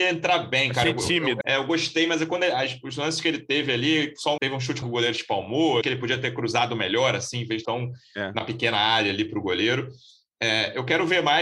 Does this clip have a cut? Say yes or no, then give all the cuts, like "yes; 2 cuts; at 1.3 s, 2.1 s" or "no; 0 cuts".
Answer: yes; 5 cuts; at 1.4 s, 4.4 s, 4.8 s, 5.8 s, 7.6 s